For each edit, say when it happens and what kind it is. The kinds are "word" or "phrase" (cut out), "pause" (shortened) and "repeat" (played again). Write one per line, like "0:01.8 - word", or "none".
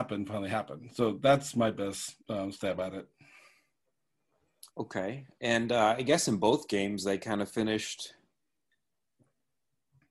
0:02.2 - pause
0:04.7 - pause